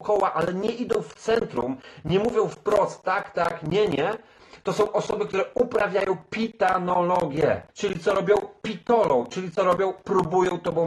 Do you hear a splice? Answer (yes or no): yes